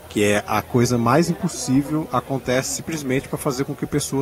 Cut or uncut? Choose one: uncut